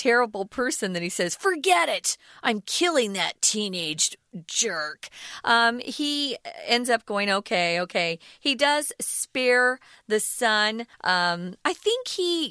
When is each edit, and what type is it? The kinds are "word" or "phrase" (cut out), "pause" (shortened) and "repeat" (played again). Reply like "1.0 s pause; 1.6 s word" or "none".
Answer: 10.9 s pause